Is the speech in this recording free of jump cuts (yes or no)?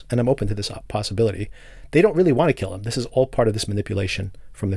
yes